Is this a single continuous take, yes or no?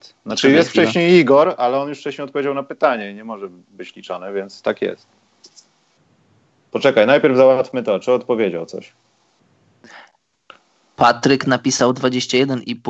yes